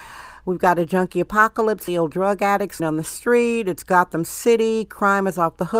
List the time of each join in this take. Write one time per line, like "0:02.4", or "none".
0:01.9
0:02.8